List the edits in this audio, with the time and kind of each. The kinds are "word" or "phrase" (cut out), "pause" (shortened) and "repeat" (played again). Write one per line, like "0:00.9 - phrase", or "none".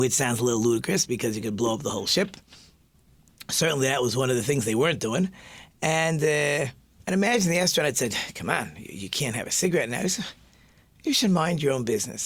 none